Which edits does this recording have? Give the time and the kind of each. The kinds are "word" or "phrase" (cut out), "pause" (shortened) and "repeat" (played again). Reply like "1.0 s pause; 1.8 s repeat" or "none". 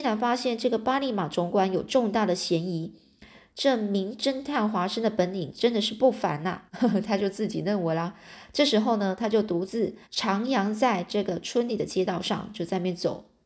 3.5 s phrase; 6.7 s pause; 10.0 s pause